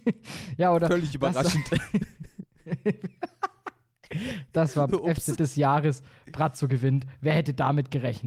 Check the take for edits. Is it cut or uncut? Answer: cut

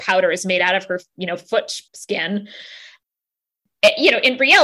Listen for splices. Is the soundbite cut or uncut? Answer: cut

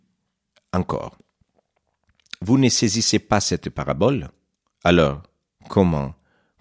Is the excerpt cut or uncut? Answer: cut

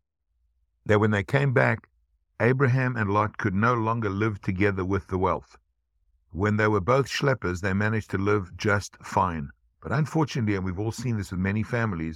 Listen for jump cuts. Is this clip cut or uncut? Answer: uncut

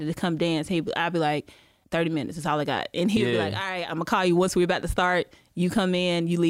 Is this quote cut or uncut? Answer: uncut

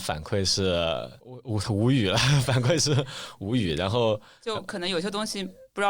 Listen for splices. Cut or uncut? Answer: cut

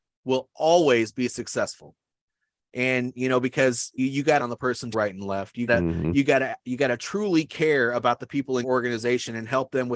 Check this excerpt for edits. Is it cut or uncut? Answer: cut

